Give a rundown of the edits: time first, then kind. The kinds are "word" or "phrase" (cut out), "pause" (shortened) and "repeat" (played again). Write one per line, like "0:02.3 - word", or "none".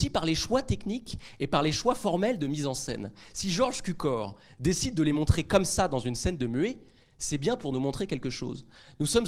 none